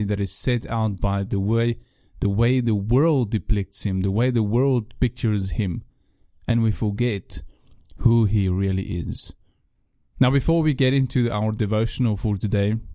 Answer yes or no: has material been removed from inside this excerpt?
no